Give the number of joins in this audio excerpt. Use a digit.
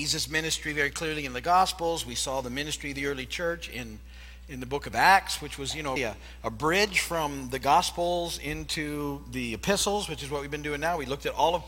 1